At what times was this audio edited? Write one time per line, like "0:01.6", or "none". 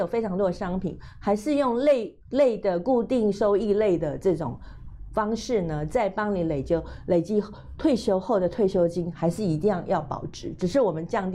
0:02.2